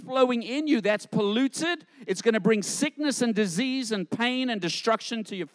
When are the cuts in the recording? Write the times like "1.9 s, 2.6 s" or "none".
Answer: none